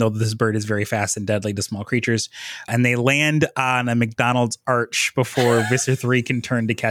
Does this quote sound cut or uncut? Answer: uncut